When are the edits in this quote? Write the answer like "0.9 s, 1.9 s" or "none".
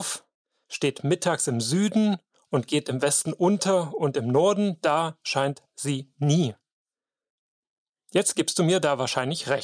none